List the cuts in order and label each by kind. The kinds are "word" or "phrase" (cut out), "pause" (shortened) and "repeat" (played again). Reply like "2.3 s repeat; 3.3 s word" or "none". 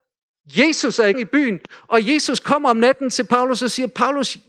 1.1 s word